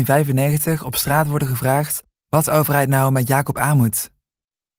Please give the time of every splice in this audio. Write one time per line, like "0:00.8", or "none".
none